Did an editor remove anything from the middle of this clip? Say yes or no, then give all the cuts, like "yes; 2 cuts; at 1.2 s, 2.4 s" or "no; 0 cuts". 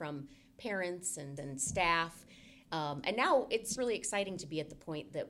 yes; 2 cuts; at 1.4 s, 3.7 s